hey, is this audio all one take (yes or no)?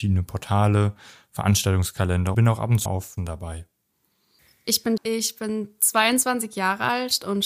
no